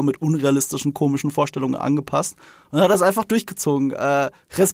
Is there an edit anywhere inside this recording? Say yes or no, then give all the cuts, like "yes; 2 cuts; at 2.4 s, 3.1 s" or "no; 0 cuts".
no; 0 cuts